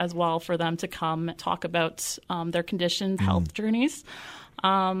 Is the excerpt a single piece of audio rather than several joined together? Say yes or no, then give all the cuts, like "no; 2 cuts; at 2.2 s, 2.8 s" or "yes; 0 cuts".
no; 2 cuts; at 1.4 s, 3.2 s